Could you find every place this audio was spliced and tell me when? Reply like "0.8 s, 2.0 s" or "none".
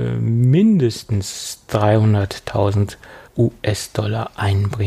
3.3 s